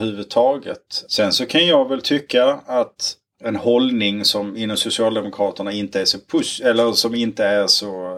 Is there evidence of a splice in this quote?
no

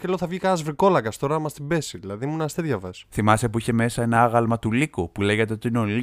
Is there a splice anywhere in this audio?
no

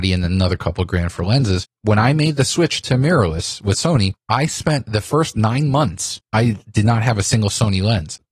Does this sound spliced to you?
no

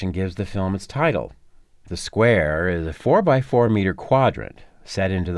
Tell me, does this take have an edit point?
no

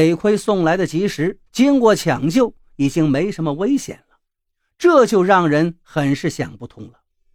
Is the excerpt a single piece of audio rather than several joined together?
no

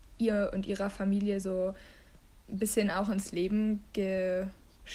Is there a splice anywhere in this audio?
no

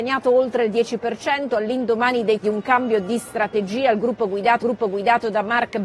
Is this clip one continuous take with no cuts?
no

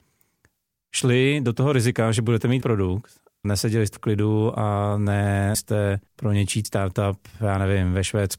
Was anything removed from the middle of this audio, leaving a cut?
yes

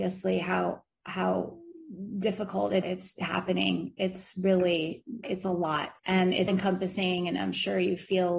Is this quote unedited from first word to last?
no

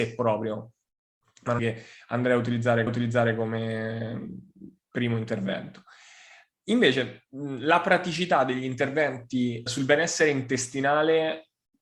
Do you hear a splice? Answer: yes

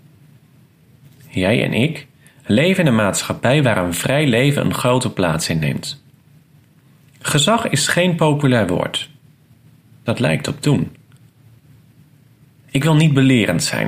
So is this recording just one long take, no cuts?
yes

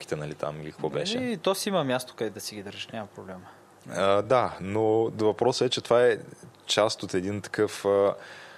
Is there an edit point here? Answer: no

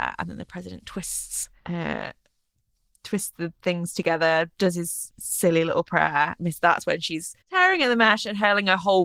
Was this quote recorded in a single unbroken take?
no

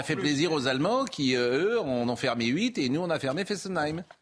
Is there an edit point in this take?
no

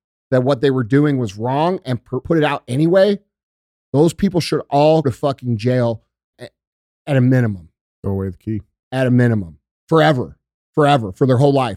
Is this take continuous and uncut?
no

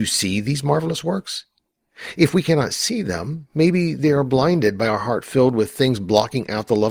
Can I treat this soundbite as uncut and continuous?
yes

